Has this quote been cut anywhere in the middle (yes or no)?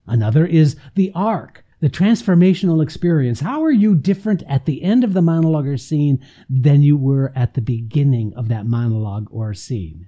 yes